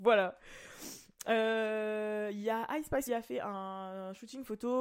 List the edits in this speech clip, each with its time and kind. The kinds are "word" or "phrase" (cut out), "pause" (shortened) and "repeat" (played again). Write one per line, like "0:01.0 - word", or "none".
0:03.1 - phrase